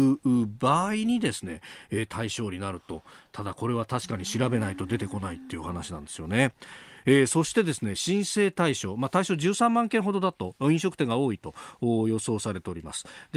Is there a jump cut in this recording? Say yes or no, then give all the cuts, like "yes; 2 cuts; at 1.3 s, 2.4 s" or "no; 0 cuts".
no; 0 cuts